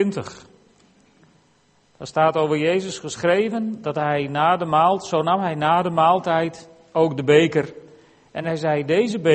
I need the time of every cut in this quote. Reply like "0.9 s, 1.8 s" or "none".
none